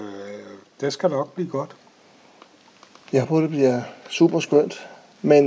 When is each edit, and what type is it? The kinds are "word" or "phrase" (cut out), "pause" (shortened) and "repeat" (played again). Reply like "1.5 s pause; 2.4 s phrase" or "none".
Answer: 3.2 s word